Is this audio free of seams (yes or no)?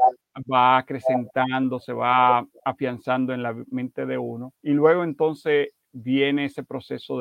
no